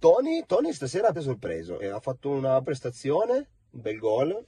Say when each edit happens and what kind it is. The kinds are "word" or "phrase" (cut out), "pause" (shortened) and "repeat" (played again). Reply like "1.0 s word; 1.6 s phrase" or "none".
1.1 s word; 1.8 s word; 2.6 s word

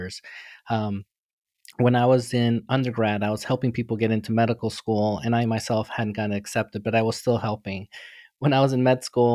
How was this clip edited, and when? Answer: none

